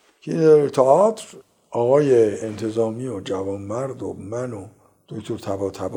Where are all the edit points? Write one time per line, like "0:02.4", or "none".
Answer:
none